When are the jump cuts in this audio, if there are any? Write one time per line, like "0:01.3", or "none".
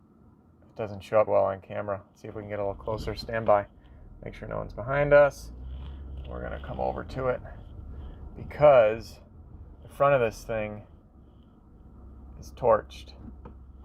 0:01.3